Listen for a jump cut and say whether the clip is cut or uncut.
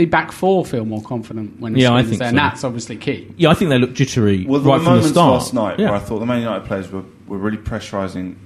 uncut